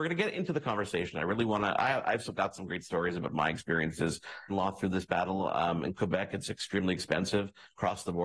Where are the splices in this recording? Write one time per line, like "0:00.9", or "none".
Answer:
0:04.5